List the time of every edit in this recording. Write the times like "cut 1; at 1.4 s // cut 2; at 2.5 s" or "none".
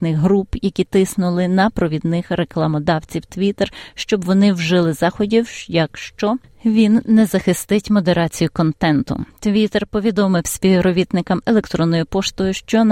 none